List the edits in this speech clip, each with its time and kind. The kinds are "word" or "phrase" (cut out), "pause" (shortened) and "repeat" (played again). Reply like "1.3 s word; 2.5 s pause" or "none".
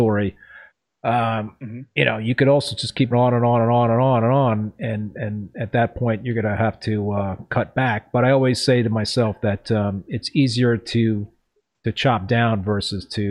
3.1 s word